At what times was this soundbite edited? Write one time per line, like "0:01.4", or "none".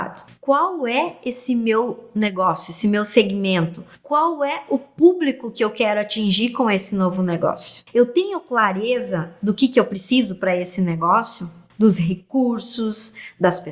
none